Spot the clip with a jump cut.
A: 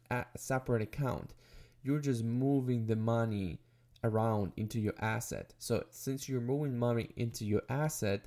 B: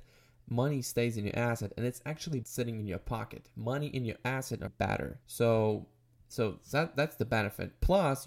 B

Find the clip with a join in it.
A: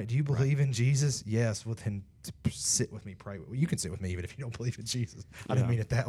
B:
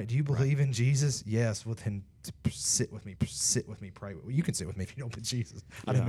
B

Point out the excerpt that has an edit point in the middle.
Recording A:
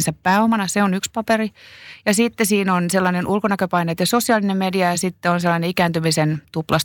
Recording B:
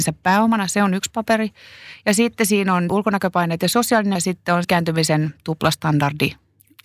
B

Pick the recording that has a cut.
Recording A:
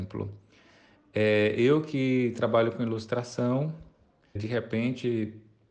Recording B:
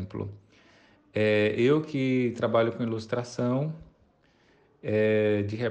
A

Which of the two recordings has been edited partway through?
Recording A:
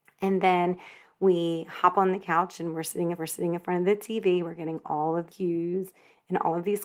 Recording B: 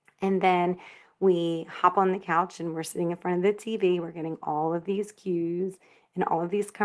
A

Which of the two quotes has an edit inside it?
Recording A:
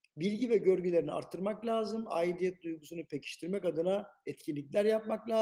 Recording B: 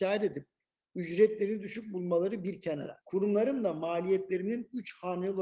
B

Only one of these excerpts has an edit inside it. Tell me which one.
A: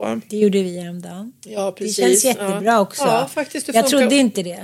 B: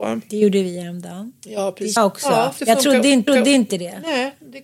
B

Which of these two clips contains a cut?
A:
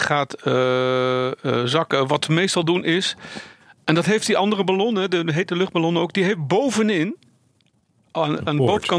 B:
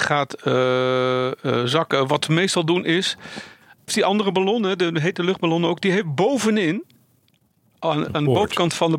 B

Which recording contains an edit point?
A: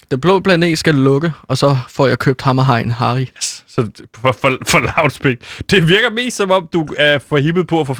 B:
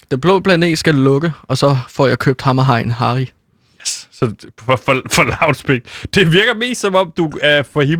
A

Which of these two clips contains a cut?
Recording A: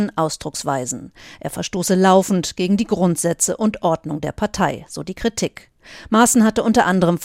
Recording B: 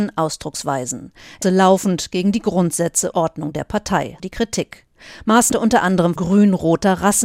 B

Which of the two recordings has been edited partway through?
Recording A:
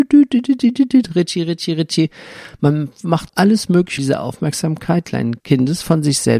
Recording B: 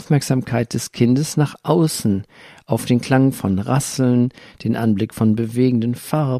A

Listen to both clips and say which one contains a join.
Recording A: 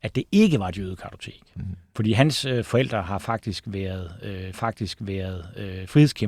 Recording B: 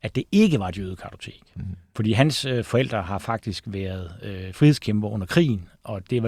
A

